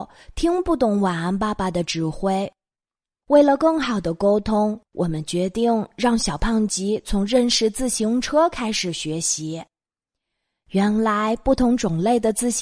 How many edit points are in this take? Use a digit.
1